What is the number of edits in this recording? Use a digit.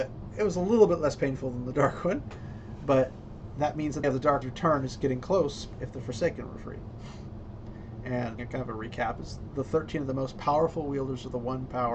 3